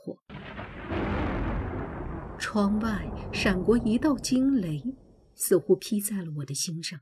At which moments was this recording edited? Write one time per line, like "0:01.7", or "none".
none